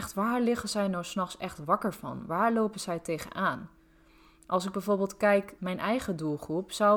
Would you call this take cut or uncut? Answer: cut